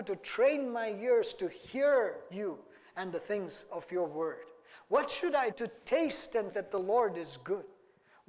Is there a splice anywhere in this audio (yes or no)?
yes